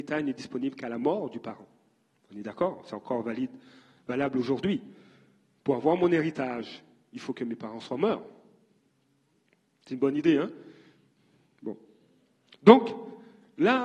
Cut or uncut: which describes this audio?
uncut